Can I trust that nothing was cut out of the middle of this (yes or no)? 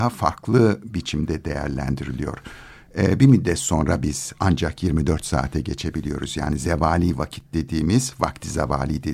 no